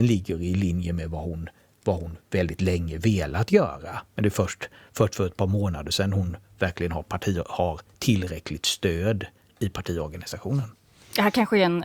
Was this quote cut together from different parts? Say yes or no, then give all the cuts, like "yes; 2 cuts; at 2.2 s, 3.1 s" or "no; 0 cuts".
no; 0 cuts